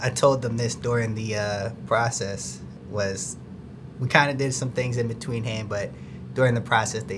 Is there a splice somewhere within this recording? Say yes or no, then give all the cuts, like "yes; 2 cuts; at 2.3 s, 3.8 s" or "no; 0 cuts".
no; 0 cuts